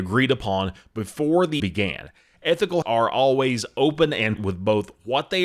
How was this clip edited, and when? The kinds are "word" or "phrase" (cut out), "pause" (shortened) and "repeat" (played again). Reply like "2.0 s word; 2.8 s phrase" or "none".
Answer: 1.6 s word; 2.8 s word; 4.4 s word